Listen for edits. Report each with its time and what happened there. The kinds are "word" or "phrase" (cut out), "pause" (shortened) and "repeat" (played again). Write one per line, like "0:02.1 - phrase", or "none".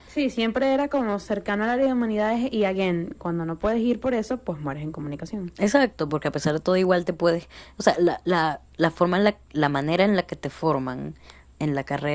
none